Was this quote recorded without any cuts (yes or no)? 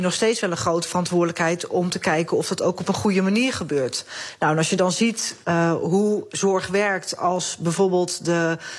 yes